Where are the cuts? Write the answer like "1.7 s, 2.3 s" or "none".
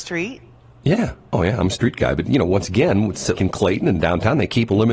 3.3 s